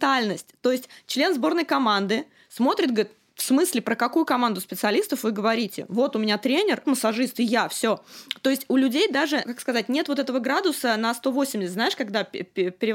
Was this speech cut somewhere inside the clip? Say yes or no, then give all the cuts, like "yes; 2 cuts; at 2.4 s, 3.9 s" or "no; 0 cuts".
yes; 2 cuts; at 6.8 s, 9.4 s